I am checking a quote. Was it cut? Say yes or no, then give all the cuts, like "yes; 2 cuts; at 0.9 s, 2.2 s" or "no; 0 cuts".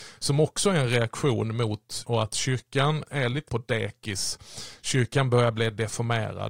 yes; 3 cuts; at 2.0 s, 3.0 s, 3.5 s